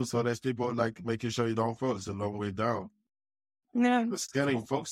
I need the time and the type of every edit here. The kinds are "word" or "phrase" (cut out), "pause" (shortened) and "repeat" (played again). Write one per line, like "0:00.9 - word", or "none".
none